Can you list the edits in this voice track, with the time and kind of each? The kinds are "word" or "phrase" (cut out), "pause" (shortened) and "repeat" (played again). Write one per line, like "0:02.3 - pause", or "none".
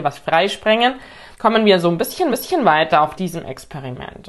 0:01.3 - pause
0:02.3 - repeat
0:03.2 - phrase